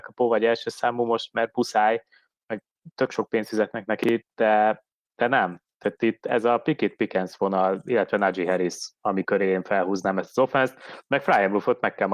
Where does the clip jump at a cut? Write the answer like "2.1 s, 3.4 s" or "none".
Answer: none